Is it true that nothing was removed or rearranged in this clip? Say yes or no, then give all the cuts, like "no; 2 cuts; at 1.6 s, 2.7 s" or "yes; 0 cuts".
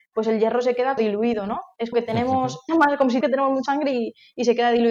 no; 5 cuts; at 1.0 s, 1.9 s, 2.7 s, 3.2 s, 3.7 s